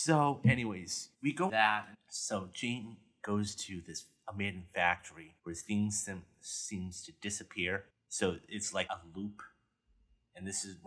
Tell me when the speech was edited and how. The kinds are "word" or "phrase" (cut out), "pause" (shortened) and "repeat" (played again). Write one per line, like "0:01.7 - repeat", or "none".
0:01.1 - pause
0:01.5 - word
0:01.9 - word
0:05.4 - pause
0:07.9 - pause
0:08.9 - word